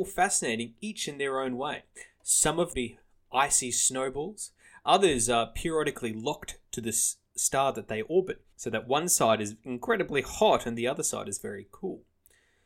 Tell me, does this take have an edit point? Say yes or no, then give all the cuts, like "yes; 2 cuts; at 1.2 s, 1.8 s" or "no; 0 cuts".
yes; 2 cuts; at 2.7 s, 8.5 s